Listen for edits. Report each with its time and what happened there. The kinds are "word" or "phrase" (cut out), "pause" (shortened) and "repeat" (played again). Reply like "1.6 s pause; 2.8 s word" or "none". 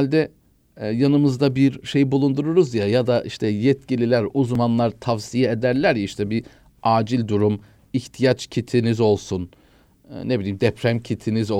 none